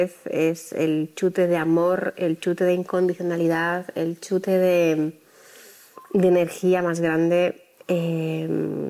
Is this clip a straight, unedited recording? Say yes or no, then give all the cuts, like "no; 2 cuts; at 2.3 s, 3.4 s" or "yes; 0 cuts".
yes; 0 cuts